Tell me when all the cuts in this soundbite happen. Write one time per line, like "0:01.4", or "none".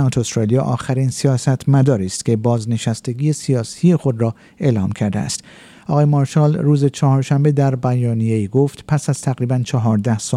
none